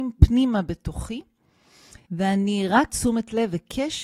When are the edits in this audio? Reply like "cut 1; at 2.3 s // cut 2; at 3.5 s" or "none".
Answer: cut 1; at 2.0 s // cut 2; at 2.9 s